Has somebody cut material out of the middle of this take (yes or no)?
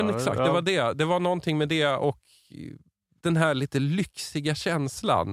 no